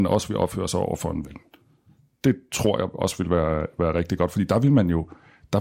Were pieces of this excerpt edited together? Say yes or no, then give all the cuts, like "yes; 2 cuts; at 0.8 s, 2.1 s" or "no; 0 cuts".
no; 0 cuts